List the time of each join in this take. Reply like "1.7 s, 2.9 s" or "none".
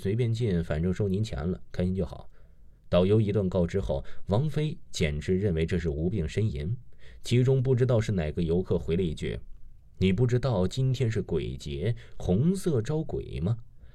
2.8 s